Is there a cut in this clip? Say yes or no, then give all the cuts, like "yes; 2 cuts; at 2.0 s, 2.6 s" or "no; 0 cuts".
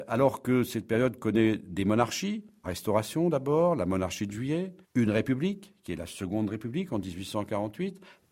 yes; 2 cuts; at 2.6 s, 4.8 s